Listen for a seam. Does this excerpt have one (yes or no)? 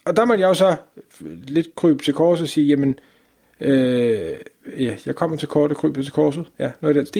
no